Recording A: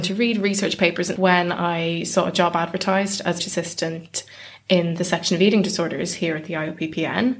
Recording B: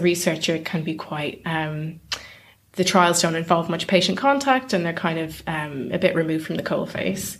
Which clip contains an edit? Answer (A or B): A